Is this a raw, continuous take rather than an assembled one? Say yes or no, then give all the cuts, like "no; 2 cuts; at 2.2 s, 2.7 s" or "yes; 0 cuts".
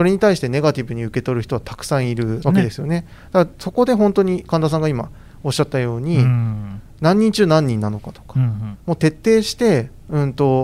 no; 1 cut; at 2.4 s